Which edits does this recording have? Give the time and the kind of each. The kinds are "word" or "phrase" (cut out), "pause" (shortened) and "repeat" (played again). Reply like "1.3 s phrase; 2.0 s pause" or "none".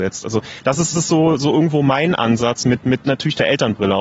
0.9 s repeat